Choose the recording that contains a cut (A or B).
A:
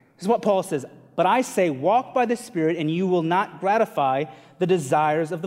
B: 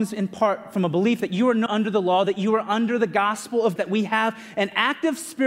B